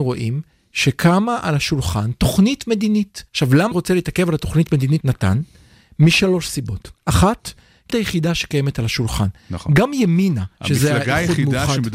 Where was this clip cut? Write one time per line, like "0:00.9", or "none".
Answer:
0:03.3
0:03.7
0:05.0
0:07.0
0:07.9
0:10.5